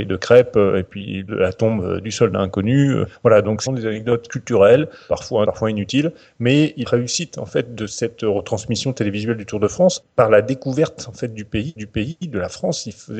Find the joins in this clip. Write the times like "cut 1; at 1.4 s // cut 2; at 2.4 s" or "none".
cut 1; at 1.3 s // cut 2; at 3.7 s // cut 3; at 5.4 s // cut 4; at 6.8 s // cut 5; at 11.8 s